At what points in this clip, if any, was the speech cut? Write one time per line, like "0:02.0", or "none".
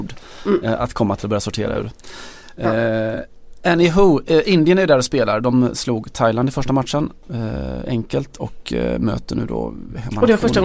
none